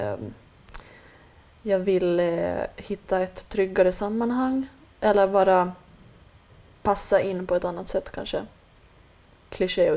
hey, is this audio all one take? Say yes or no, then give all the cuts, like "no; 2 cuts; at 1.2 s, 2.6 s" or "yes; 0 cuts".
yes; 0 cuts